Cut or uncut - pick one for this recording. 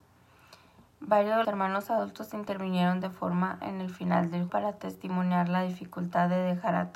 cut